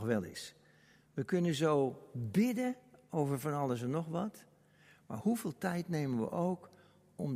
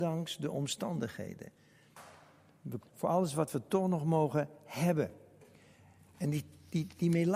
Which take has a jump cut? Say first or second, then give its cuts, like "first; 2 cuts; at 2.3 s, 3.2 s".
second; 1 cut; at 2.8 s